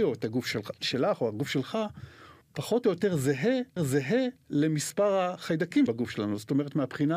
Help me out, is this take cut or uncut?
cut